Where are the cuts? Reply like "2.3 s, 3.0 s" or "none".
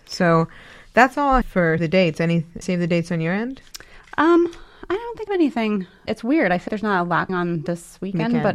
1.4 s, 1.8 s, 2.6 s, 5.3 s, 6.1 s, 6.7 s, 7.3 s